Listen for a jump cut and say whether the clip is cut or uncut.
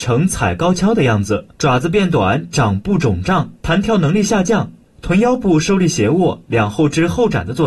cut